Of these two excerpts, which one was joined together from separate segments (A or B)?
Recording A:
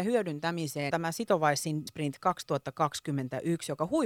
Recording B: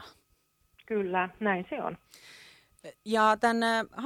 A